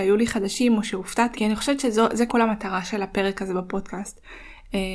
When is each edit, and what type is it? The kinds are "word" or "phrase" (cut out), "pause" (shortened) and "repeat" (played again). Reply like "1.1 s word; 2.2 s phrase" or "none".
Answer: 1.4 s word; 2.3 s word